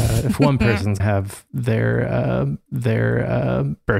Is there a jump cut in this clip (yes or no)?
yes